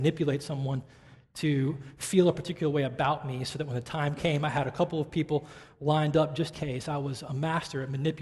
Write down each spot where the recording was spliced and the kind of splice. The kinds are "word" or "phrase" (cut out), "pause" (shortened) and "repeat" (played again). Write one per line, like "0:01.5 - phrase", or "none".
0:06.5 - word